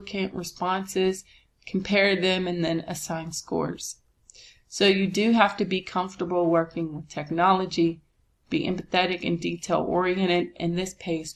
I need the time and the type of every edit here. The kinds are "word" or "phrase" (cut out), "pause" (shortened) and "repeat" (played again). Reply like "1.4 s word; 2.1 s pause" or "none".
none